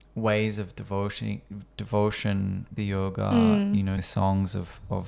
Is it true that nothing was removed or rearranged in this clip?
no; 2 cuts; at 2.8 s, 4.0 s

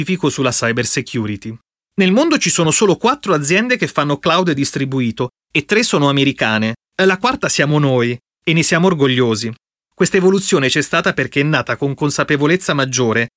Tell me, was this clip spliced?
no; 0 cuts

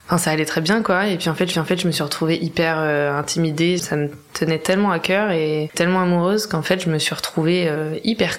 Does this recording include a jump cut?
yes; 3 cuts; at 1.5 s, 3.8 s, 5.7 s

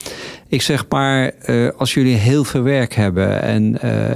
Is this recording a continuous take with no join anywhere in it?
yes; 0 cuts

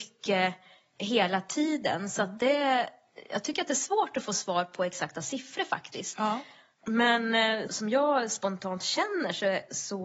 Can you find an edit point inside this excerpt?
yes; 1 cut; at 7.7 s

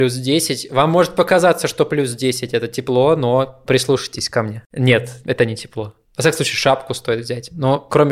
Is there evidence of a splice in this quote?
no; 0 cuts

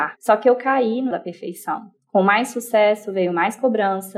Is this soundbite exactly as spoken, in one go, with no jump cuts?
no; 1 cut; at 1.1 s

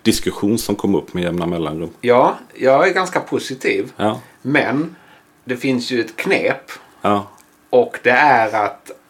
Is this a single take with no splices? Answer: yes; 0 cuts

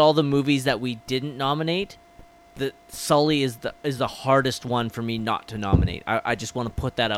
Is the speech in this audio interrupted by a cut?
no; 0 cuts

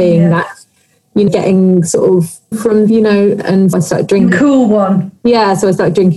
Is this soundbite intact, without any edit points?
no; 5 cuts; at 1.3 s, 2.5 s, 2.9 s, 3.7 s, 4.3 s

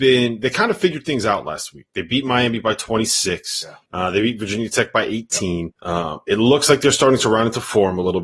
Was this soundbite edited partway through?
yes; 2 cuts; at 3.8 s, 5.8 s

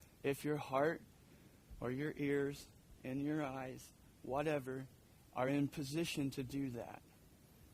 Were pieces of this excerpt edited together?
no; 0 cuts

